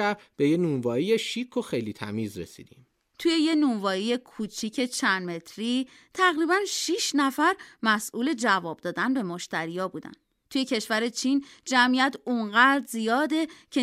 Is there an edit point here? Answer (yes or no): no